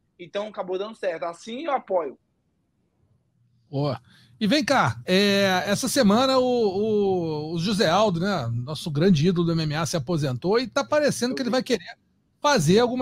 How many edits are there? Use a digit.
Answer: 0